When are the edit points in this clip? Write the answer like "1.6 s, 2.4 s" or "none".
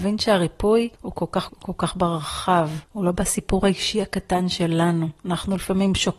0.9 s, 1.5 s, 2.8 s